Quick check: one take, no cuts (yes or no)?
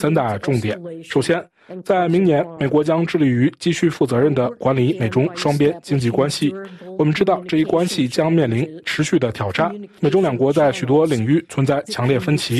yes